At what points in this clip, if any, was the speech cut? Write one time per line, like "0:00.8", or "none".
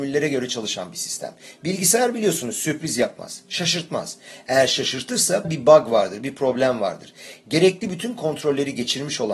0:05.4